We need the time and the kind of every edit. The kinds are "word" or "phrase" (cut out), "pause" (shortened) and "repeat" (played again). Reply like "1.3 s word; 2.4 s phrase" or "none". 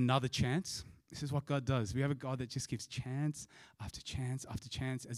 none